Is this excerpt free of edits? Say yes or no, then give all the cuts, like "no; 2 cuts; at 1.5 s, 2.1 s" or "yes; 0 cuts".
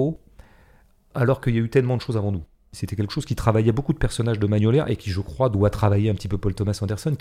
yes; 0 cuts